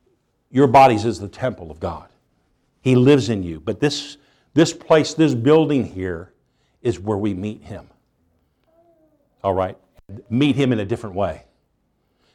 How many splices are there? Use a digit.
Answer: 0